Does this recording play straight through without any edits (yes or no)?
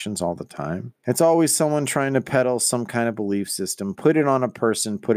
no